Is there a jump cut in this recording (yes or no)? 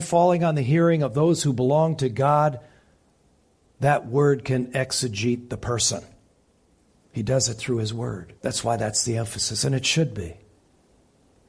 yes